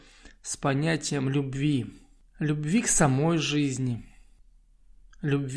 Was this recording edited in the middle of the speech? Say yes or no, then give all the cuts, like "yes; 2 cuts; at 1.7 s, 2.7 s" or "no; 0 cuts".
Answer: no; 0 cuts